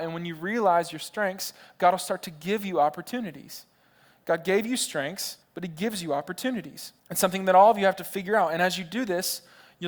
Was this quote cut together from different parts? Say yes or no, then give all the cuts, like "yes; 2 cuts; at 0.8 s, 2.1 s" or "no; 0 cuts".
yes; 2 cuts; at 5.4 s, 7.0 s